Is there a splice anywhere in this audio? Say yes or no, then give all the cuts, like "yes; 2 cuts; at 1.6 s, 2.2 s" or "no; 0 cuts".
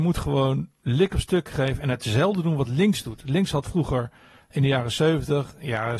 no; 0 cuts